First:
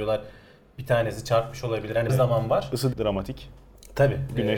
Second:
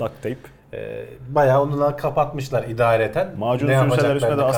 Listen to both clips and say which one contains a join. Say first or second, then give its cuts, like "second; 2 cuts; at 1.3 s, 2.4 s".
first; 2 cuts; at 2.1 s, 2.9 s